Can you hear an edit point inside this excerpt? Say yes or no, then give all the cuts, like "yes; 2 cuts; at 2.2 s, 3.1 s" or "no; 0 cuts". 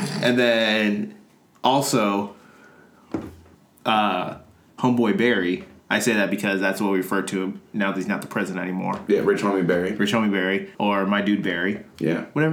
yes; 3 cuts; at 3.5 s, 5.8 s, 10.7 s